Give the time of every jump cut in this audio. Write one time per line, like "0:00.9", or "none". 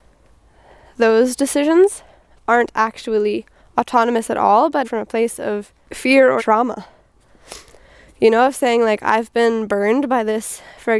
0:03.6
0:04.8
0:05.8
0:06.4